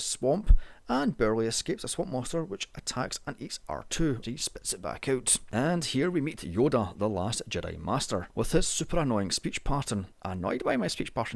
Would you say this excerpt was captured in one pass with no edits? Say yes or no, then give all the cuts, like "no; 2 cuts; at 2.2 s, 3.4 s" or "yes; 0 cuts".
no; 2 cuts; at 4.2 s, 10.1 s